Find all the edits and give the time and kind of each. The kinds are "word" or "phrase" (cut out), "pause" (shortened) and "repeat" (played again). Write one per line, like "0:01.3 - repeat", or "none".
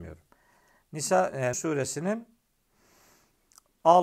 0:01.5 - word